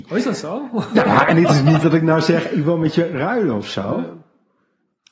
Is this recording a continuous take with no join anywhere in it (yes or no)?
no